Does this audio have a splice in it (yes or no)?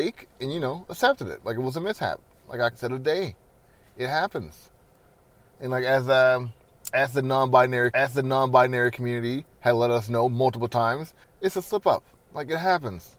yes